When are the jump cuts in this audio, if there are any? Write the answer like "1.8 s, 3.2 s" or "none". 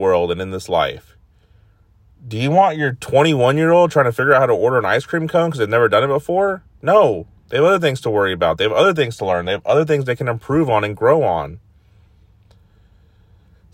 none